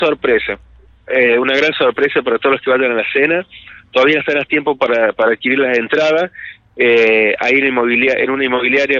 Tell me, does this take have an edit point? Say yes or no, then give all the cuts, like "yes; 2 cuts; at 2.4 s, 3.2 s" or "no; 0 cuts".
no; 0 cuts